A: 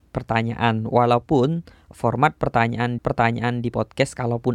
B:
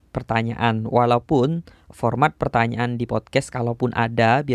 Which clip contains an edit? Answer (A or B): A